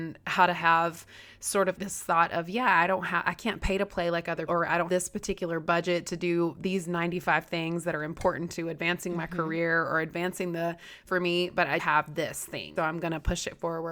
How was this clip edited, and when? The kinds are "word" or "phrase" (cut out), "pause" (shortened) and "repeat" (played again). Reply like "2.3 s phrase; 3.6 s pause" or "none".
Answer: 1.8 s word; 4.5 s word; 4.9 s word; 11.1 s word; 11.8 s word; 12.8 s word